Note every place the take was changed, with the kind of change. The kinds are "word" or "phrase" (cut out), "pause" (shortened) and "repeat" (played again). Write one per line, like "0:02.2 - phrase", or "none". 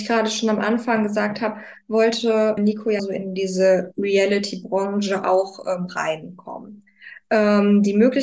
0:02.6 - word
0:03.0 - word